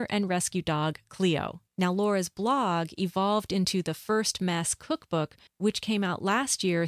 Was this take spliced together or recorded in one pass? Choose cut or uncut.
cut